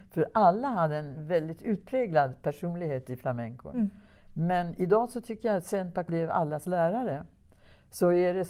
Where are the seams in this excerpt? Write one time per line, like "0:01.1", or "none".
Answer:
0:06.1